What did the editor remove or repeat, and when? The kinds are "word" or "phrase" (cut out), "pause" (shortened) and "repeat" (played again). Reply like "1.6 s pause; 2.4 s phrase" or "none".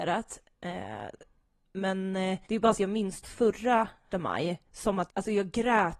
2.4 s pause; 2.7 s phrase; 3.2 s word; 4.1 s word; 4.7 s pause; 5.1 s word